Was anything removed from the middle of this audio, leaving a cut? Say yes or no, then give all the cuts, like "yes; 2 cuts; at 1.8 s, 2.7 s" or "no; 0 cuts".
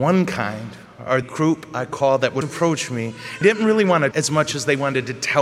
yes; 4 cuts; at 1.2 s, 2.4 s, 3.4 s, 4.1 s